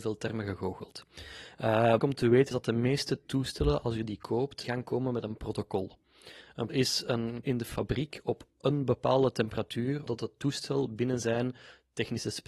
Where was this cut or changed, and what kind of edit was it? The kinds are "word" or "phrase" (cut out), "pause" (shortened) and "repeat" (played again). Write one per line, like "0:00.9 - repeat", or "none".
0:02.0 - word
0:02.5 - word
0:04.6 - word
0:06.7 - word
0:07.4 - word
0:10.1 - word